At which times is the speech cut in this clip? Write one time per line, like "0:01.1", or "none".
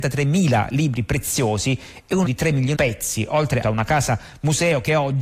0:02.2
0:02.7
0:03.6